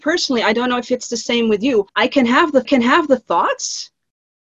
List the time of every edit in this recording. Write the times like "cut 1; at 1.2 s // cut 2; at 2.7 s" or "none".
cut 1; at 1.9 s // cut 2; at 2.6 s